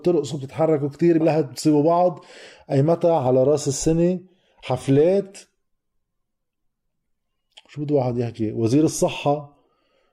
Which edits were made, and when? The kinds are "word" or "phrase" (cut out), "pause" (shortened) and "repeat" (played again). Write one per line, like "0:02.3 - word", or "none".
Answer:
0:01.2 - word